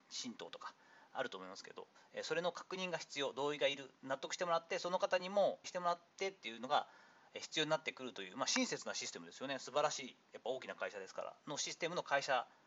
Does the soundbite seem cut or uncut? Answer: cut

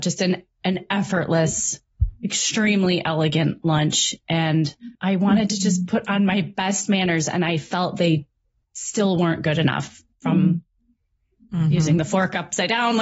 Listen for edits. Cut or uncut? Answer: cut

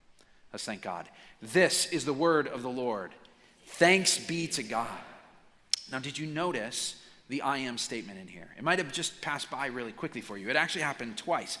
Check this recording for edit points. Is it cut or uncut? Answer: uncut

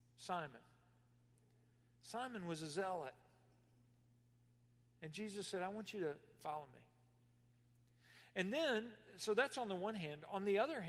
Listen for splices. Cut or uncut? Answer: uncut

